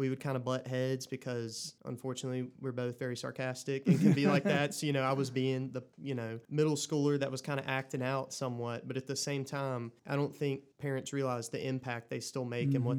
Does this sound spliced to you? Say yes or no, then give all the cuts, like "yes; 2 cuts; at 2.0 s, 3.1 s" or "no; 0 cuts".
yes; 5 cuts; at 1.8 s, 5.9 s, 6.4 s, 10.0 s, 10.7 s